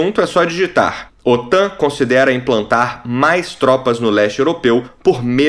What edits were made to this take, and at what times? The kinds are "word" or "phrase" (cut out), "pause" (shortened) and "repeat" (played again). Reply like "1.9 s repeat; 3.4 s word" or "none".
none